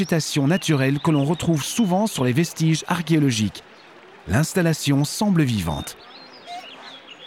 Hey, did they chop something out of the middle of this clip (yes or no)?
no